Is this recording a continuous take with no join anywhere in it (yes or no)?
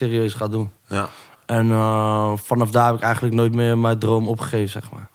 yes